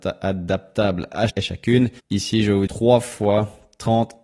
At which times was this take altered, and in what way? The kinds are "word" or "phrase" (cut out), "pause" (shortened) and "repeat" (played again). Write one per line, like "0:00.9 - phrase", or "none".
0:01.3 - word
0:02.0 - pause
0:02.7 - word